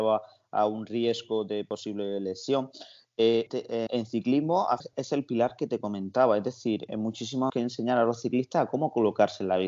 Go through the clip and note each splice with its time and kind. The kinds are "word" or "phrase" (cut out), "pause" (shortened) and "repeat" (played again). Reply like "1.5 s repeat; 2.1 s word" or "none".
3.5 s word; 3.9 s word; 4.8 s word; 6.9 s word; 7.5 s phrase